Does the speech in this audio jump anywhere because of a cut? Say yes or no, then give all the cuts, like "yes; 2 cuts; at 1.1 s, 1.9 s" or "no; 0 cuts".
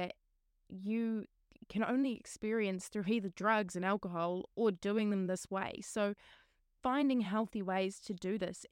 no; 0 cuts